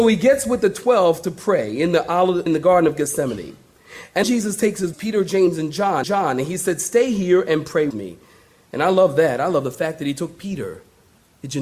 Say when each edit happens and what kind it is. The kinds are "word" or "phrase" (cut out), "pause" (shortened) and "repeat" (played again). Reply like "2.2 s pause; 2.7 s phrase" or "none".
2.5 s word; 4.2 s word; 4.9 s word; 6.0 s repeat; 7.9 s word